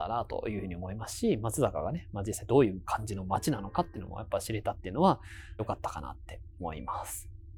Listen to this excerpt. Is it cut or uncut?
cut